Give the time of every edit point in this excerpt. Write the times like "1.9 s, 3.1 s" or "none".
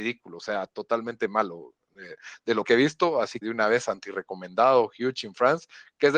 2.6 s, 3.4 s